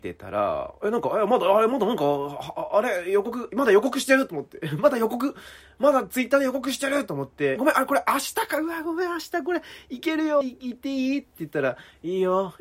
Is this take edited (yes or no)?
yes